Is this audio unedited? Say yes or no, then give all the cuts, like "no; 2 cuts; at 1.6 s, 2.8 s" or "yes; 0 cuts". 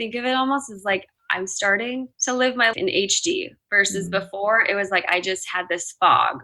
no; 2 cuts; at 2.1 s, 2.7 s